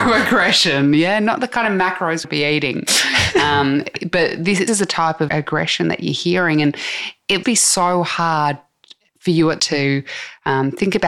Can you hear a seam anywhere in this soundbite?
yes; 5 cuts; at 2.2 s, 4.7 s, 5.3 s, 7.4 s, 9.6 s

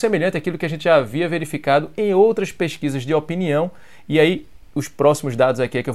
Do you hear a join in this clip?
no; 0 cuts

